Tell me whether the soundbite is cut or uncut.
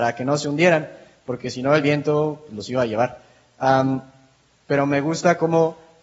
uncut